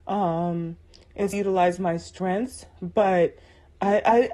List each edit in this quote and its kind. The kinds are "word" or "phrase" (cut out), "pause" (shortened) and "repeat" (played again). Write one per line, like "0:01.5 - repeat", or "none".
0:01.3 - word